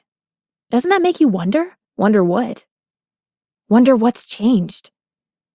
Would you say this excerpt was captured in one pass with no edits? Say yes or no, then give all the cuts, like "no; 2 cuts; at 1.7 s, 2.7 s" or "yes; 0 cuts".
no; 1 cut; at 1.8 s